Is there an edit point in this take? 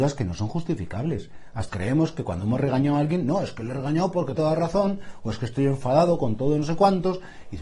yes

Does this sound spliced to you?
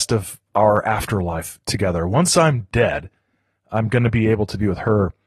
no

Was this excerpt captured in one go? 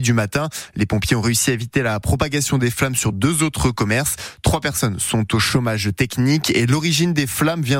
yes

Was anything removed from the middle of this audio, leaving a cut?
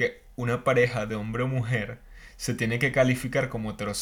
no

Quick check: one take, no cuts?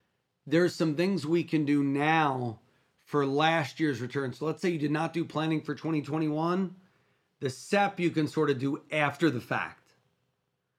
yes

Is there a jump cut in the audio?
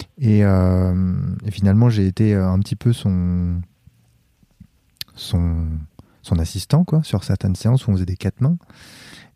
no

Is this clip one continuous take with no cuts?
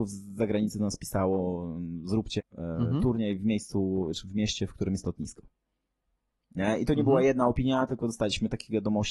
no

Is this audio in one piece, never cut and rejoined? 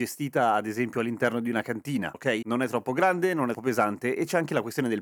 no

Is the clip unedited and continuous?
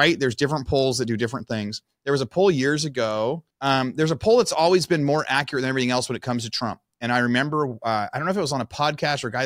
no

